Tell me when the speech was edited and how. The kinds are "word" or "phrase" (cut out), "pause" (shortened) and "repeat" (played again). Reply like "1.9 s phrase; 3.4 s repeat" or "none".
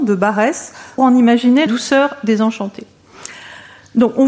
1.0 s word; 1.7 s word